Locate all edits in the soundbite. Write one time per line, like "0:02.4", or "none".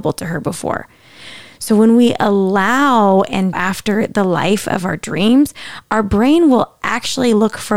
0:03.5